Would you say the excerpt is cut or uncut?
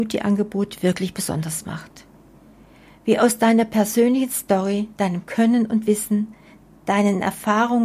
uncut